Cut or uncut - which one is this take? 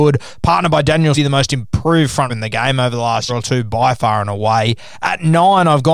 cut